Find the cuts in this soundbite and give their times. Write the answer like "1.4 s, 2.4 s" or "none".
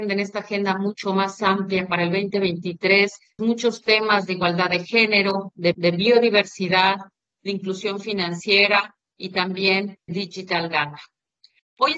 3.4 s, 5.7 s, 10.1 s

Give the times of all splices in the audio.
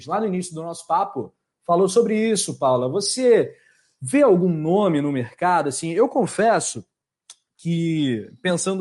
none

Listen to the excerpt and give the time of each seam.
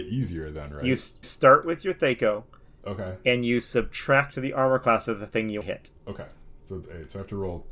1.2 s, 5.6 s, 6.0 s

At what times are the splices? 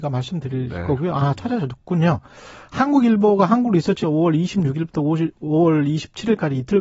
4.0 s

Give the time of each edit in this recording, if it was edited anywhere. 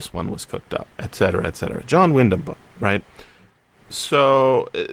0.9 s

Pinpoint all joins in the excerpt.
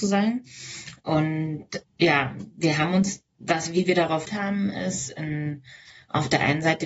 1.8 s, 3.3 s, 4.3 s

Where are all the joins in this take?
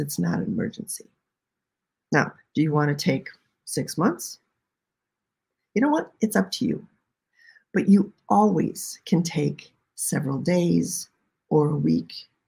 none

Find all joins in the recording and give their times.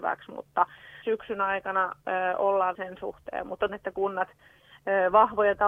1.0 s, 2.7 s, 3.7 s

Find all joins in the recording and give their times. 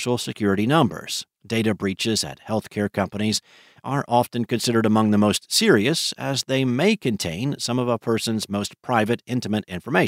1.3 s

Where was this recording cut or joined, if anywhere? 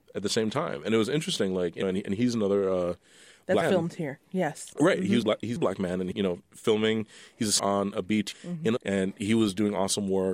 1.8 s, 3.6 s, 5.2 s, 5.6 s, 6.1 s, 7.6 s, 8.3 s, 8.8 s

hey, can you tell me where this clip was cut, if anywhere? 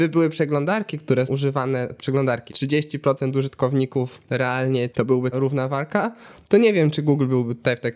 1.3 s, 2.5 s, 4.9 s, 5.3 s

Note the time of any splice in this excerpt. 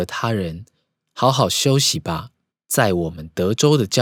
2.5 s

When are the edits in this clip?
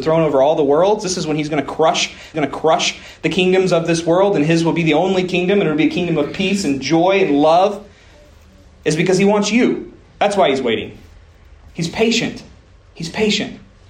2.3 s

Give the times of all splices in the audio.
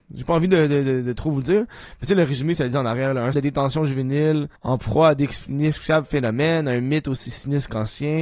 3.3 s, 4.6 s

